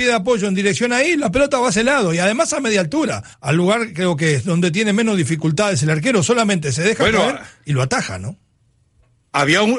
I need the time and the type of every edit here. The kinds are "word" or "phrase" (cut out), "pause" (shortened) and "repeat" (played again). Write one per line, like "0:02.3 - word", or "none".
0:03.3 - pause